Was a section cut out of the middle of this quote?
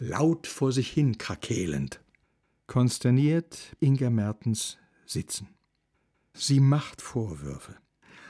yes; 2 cuts; at 3.8 s, 7.0 s

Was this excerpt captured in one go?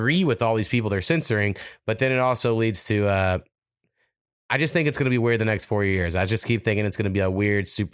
yes; 0 cuts

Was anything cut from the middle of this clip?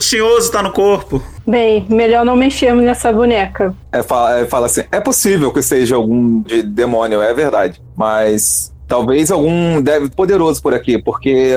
yes; 2 cuts; at 6.5 s, 10.1 s

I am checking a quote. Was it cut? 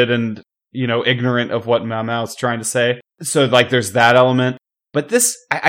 yes; 1 cut; at 3.1 s

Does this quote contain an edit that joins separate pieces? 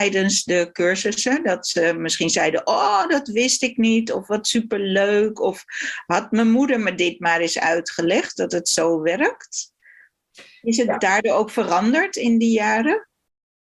no; 0 cuts

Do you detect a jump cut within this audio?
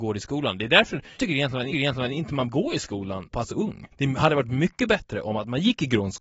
yes; 5 cuts; at 1.2 s, 1.7 s, 2.5 s, 3.3 s, 3.9 s

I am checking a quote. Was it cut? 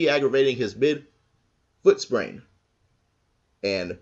no; 0 cuts

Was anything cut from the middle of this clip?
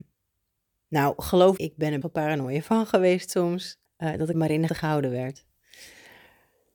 yes; 5 cuts; at 1.6 s, 2.0 s, 3.9 s, 4.3 s, 4.7 s

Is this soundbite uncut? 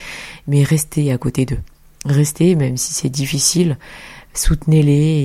yes; 0 cuts

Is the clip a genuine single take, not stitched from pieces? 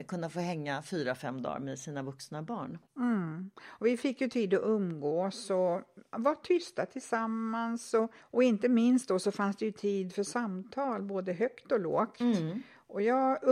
no; 2 cuts; at 2.9 s, 8.2 s

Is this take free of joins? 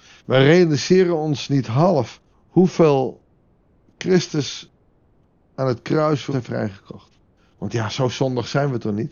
no; 3 cuts; at 2.3 s, 6.3 s, 7.3 s

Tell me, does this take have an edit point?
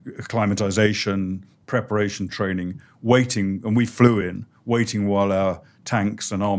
no; 0 cuts

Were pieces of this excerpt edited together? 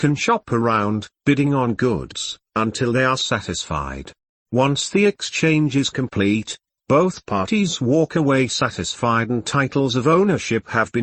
no; 0 cuts

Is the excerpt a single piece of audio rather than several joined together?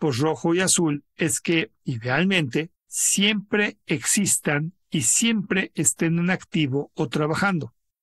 no; 2 cuts; at 2.8 s, 4.8 s

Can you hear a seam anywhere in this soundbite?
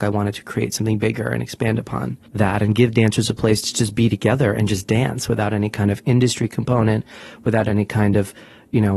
yes; 1 cut; at 2.3 s

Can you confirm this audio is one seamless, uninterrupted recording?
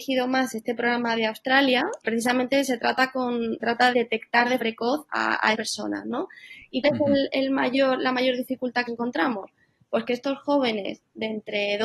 no; 9 cuts; at 1.2 s, 2.0 s, 3.6 s, 3.9 s, 4.6 s, 5.1 s, 5.5 s, 6.8 s, 8.9 s

